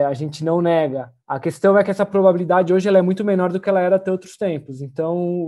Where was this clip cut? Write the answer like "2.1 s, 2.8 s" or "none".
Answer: 1.2 s